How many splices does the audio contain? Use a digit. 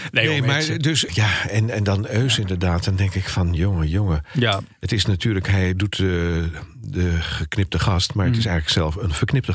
1